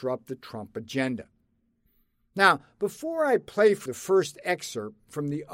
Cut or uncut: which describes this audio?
cut